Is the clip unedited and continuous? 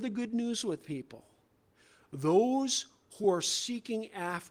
yes; 0 cuts

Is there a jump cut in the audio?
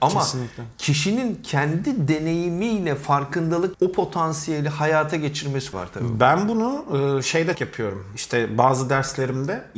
yes; 3 cuts; at 3.7 s, 5.7 s, 7.5 s

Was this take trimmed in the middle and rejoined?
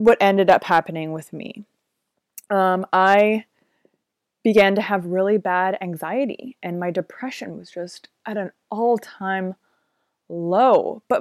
no; 0 cuts

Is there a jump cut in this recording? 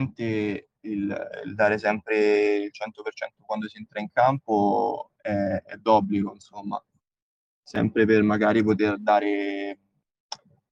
no; 0 cuts

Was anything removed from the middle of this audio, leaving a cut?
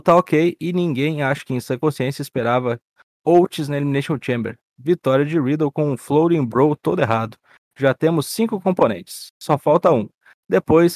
no; 0 cuts

